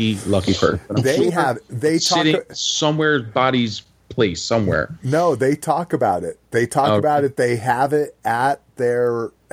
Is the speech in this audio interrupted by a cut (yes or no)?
no